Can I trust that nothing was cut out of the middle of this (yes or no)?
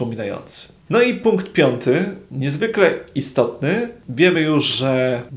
yes